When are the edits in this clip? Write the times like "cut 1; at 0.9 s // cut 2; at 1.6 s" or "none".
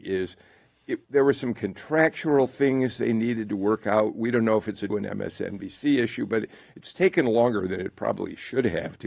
cut 1; at 1.0 s // cut 2; at 4.9 s